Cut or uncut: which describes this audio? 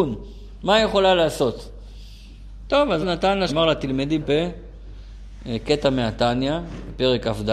cut